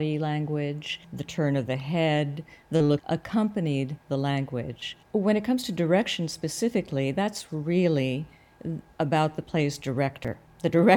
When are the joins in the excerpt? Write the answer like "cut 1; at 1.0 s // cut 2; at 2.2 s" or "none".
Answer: cut 1; at 1.0 s // cut 2; at 3.0 s // cut 3; at 5.0 s